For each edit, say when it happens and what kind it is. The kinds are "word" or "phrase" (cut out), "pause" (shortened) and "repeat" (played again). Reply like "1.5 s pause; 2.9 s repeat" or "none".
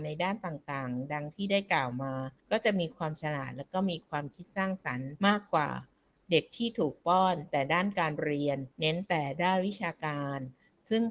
2.4 s pause; 5.2 s pause; 8.7 s pause

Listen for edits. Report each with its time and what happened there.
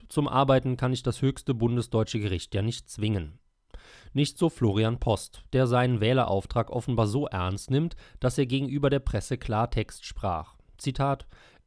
none

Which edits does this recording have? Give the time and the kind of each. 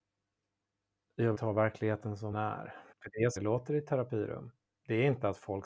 1.3 s word; 2.3 s word; 2.9 s pause; 3.4 s word

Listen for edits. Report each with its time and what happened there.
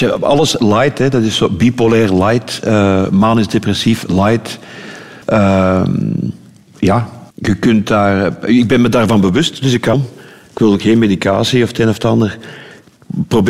5.2 s pause; 7.3 s pause; 9.9 s word

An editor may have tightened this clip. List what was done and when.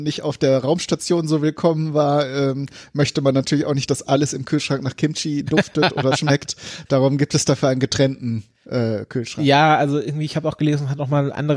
none

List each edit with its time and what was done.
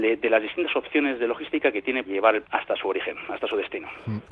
2.1 s word; 2.4 s word

